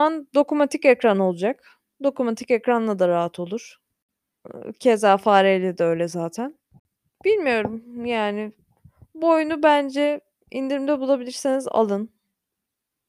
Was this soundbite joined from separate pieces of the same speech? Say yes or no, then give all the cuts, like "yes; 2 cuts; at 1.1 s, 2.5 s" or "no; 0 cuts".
no; 0 cuts